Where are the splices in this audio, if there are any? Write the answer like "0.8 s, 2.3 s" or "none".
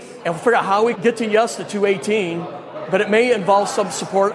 1.0 s